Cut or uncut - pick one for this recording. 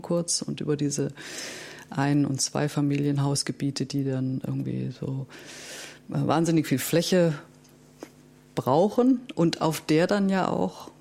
uncut